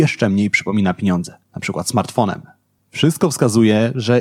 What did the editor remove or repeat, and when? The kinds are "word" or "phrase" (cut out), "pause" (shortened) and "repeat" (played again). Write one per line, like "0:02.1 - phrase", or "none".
0:01.4 - pause
0:02.8 - pause